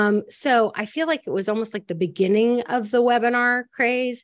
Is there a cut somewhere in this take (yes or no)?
no